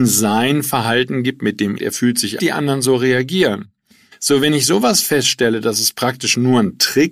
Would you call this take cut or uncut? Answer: cut